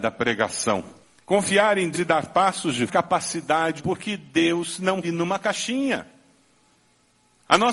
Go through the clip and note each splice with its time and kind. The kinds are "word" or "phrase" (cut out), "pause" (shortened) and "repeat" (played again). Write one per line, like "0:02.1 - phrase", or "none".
0:01.0 - pause
0:01.9 - word
0:02.9 - phrase
0:03.8 - word
0:05.0 - word